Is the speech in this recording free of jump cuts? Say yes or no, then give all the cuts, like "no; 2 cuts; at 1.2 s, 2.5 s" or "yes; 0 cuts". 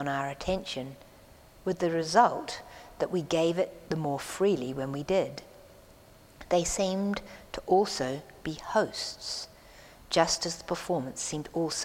yes; 0 cuts